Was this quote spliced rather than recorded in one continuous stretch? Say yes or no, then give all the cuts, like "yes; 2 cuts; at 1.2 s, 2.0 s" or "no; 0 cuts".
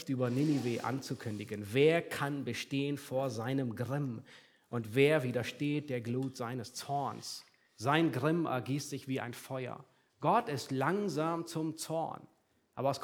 no; 0 cuts